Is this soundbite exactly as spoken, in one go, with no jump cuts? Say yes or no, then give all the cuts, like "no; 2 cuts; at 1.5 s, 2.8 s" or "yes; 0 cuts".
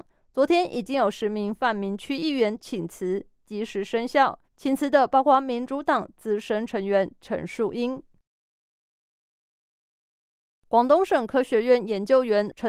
no; 1 cut; at 4.4 s